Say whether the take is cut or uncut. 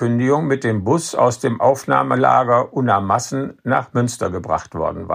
uncut